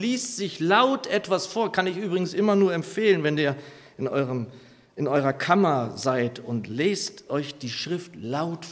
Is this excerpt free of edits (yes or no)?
yes